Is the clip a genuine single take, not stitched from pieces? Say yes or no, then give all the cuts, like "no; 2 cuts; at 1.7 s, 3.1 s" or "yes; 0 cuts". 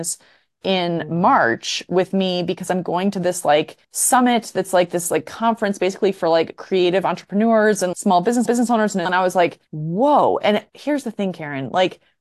no; 6 cuts; at 3.8 s, 7.9 s, 8.4 s, 9.0 s, 9.7 s, 10.7 s